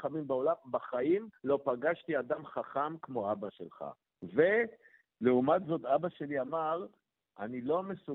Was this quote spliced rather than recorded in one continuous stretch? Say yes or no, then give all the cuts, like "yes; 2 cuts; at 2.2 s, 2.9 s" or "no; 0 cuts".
yes; 2 cuts; at 1.4 s, 4.0 s